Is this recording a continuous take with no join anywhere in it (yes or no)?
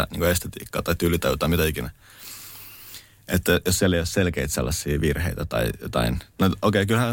yes